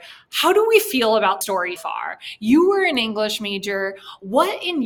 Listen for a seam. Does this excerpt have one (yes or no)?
yes